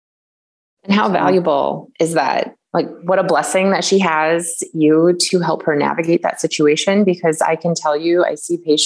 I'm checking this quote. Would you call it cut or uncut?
uncut